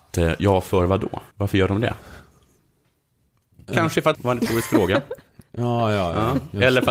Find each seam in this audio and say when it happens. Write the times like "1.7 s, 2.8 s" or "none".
1.3 s, 4.1 s